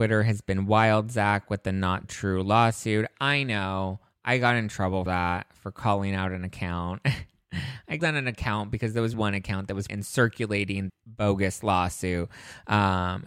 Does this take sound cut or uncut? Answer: cut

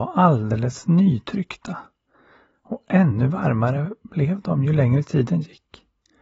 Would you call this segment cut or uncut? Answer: uncut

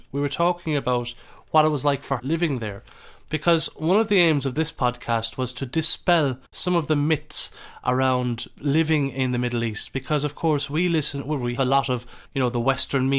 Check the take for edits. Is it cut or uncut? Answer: cut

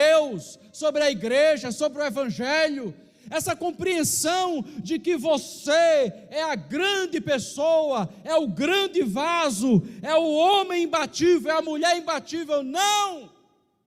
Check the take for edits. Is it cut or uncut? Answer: uncut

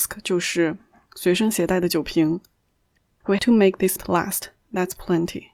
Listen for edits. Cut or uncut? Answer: cut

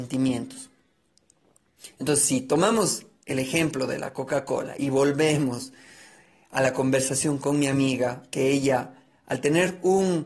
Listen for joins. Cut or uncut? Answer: uncut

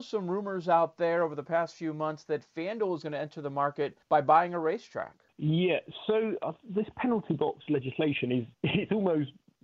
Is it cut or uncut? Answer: cut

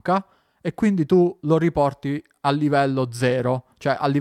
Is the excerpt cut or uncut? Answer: uncut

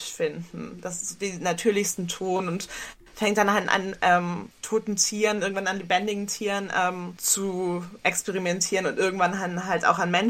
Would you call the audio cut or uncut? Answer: uncut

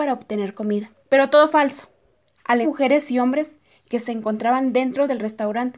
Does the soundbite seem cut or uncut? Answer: cut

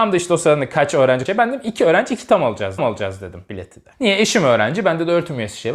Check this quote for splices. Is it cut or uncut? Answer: cut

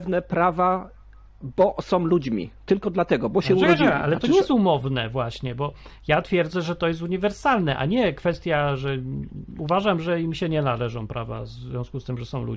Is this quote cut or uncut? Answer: uncut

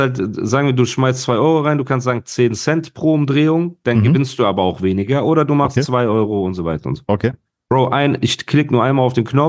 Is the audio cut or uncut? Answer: uncut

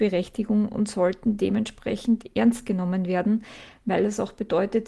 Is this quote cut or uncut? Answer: uncut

